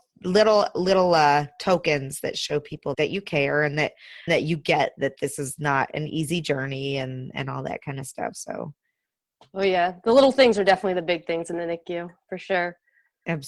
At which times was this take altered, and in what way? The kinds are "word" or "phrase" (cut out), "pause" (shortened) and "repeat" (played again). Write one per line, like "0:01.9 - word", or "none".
0:02.9 - word
0:04.3 - word